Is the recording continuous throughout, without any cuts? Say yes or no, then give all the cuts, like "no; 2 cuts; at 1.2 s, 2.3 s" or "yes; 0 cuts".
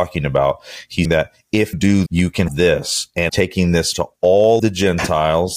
no; 7 cuts; at 1.0 s, 1.7 s, 2.1 s, 2.5 s, 3.3 s, 3.9 s, 4.6 s